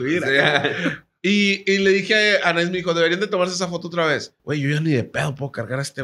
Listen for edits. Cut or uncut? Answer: cut